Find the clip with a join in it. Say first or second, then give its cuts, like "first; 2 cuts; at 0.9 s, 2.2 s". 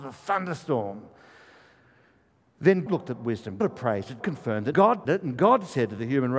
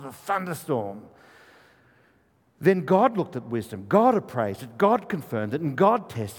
first; 5 cuts; at 2.9 s, 3.6 s, 4.2 s, 4.7 s, 5.0 s